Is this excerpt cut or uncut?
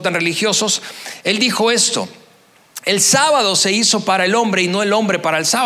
uncut